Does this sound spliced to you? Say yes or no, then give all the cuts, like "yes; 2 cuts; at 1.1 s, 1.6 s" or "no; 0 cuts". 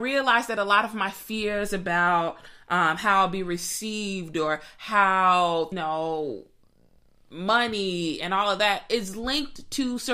yes; 1 cut; at 5.7 s